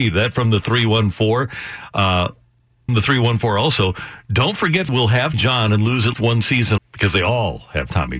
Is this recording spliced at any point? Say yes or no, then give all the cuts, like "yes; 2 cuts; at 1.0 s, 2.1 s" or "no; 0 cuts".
yes; 5 cuts; at 2.9 s, 4.9 s, 5.3 s, 6.1 s, 6.8 s